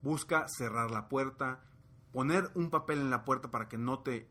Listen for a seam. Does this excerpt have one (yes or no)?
no